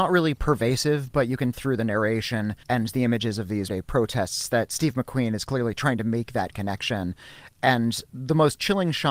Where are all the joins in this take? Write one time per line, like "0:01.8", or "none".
0:01.5
0:02.6
0:03.7